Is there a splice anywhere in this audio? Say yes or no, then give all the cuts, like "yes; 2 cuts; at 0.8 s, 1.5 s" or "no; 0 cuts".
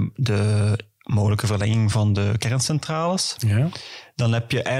no; 0 cuts